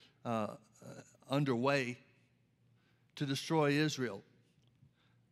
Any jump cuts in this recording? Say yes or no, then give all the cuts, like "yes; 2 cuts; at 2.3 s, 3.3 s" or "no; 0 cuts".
no; 0 cuts